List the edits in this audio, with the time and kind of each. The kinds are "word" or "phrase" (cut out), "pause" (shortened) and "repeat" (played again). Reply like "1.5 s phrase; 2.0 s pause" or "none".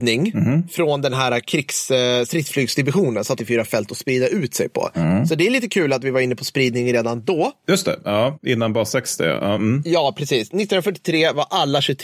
3.4 s phrase